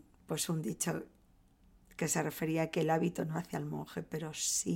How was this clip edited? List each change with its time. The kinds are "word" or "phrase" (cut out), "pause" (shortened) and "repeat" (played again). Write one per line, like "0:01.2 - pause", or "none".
none